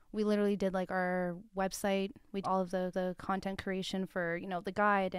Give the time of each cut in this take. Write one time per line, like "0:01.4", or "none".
0:01.5
0:02.4
0:02.9